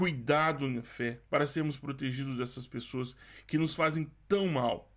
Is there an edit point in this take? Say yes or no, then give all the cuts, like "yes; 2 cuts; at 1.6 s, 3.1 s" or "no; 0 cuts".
yes; 1 cut; at 1.3 s